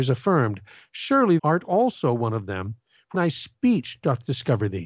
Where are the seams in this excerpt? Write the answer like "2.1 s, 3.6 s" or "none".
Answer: 1.4 s, 3.1 s